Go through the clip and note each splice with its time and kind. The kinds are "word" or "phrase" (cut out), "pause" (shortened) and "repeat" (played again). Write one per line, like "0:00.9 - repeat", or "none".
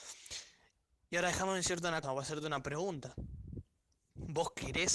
0:02.0 - word